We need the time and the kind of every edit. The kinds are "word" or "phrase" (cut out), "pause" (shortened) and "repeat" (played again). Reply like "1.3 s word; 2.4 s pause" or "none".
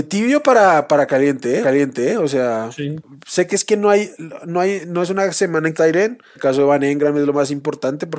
1.6 s repeat; 5.7 s phrase; 6.3 s phrase